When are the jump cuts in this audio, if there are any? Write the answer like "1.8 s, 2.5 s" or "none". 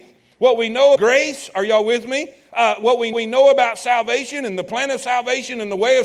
1.0 s, 3.1 s